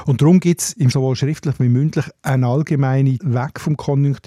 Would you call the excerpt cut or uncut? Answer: cut